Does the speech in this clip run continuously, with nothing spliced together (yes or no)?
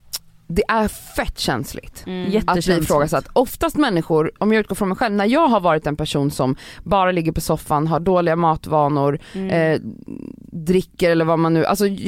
no